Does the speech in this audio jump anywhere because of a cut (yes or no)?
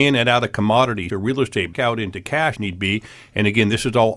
yes